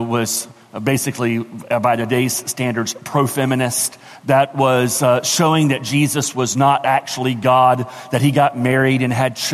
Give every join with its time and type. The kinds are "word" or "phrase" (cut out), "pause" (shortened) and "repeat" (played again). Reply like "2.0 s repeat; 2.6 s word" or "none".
none

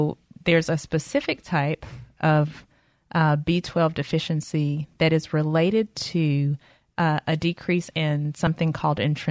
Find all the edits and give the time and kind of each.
none

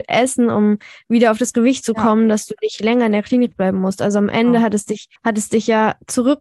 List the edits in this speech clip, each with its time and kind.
5.2 s pause

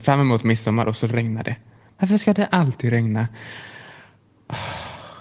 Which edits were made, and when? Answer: none

